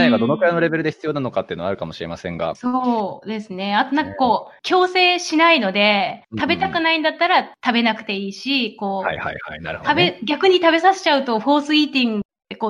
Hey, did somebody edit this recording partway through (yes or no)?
no